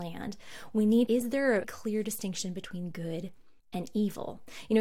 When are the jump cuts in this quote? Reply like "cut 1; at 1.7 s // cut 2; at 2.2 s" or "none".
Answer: cut 1; at 1.1 s // cut 2; at 1.6 s // cut 3; at 3.6 s